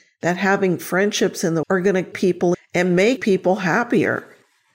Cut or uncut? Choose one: cut